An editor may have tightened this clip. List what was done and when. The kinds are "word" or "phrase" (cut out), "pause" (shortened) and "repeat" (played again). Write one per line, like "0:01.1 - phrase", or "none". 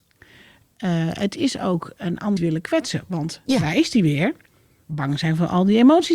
0:02.4 - word